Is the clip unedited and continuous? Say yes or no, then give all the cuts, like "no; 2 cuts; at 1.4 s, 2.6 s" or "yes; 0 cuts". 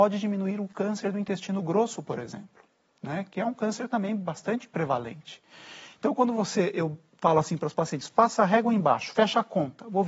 yes; 0 cuts